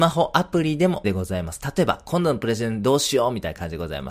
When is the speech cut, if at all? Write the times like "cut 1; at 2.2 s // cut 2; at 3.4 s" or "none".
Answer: cut 1; at 1.0 s